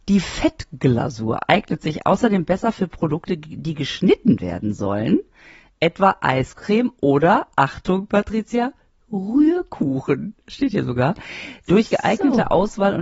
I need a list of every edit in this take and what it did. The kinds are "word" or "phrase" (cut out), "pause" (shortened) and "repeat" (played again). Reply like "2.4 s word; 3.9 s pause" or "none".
none